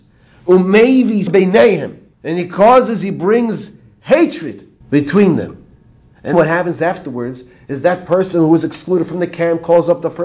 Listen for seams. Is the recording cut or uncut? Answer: cut